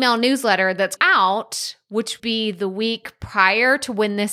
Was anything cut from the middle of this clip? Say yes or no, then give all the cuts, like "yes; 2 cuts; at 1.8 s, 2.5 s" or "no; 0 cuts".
yes; 2 cuts; at 1.0 s, 2.2 s